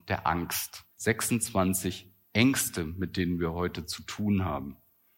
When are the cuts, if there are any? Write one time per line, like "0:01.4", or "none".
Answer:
0:00.9